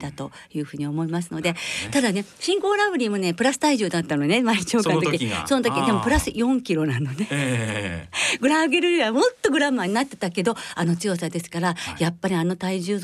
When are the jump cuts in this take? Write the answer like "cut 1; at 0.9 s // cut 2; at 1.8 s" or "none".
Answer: none